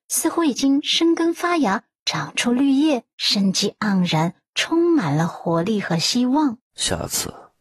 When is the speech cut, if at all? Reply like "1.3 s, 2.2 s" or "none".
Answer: 3.1 s, 6.6 s